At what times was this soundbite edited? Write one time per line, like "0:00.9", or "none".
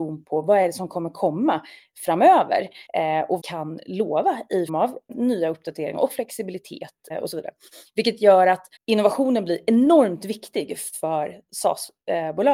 0:02.9
0:03.4
0:04.7
0:05.1
0:07.1
0:08.8